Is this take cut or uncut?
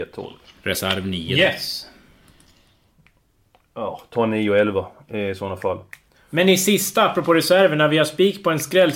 uncut